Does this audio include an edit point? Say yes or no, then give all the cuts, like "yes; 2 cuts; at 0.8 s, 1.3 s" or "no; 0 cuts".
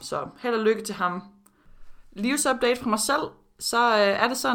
no; 0 cuts